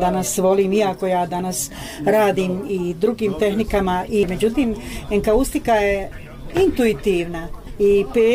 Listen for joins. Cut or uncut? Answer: uncut